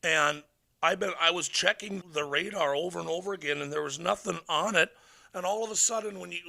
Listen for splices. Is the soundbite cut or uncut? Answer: cut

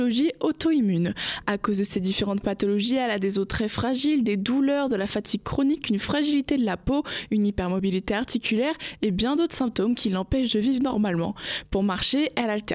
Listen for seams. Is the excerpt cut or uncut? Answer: uncut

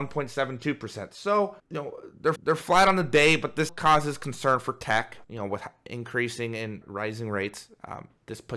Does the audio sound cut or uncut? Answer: cut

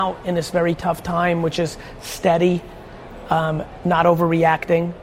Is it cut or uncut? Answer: uncut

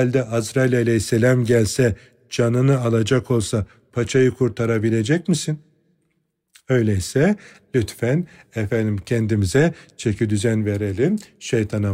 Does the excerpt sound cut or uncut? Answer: uncut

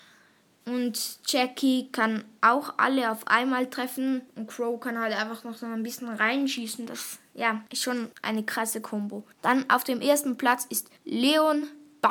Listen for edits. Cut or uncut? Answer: cut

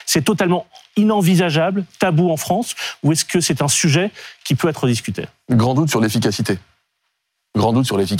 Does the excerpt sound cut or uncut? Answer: uncut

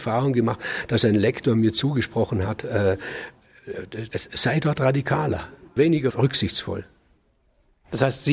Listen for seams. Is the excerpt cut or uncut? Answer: cut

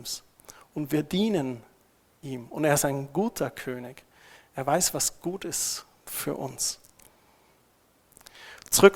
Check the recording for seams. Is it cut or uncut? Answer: uncut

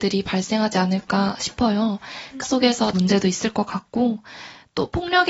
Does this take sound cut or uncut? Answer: cut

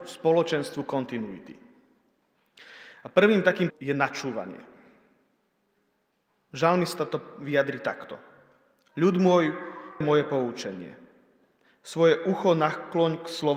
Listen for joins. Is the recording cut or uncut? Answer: cut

